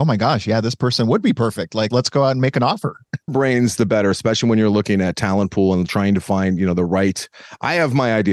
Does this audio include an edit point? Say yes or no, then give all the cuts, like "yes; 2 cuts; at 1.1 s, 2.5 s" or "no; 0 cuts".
yes; 2 cuts; at 1.9 s, 3.3 s